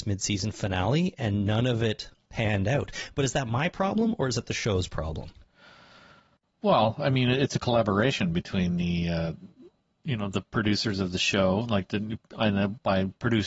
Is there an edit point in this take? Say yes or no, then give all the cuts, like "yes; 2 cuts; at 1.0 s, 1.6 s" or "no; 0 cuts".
no; 0 cuts